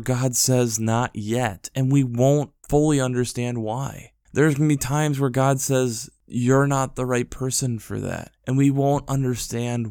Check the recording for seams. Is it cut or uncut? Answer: cut